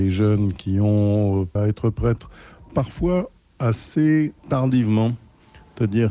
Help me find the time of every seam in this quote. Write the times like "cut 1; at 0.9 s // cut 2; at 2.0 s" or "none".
cut 1; at 1.6 s